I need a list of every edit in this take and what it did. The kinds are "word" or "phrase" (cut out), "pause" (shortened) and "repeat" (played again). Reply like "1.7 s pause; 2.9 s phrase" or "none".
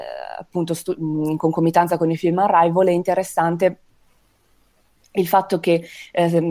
none